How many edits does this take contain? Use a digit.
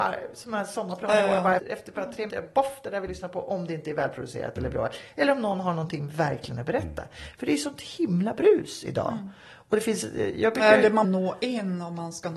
5